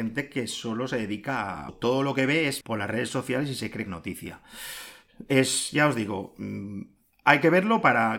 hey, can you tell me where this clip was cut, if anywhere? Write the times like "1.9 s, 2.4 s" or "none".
1.7 s, 2.6 s, 3.9 s